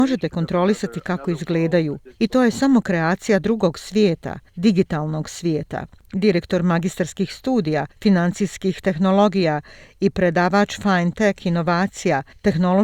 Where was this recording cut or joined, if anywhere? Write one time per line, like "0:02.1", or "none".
none